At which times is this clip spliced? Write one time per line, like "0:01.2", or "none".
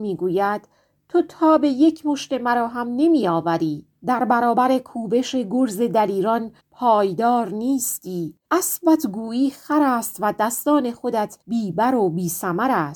0:04.0
0:06.6
0:08.4
0:11.4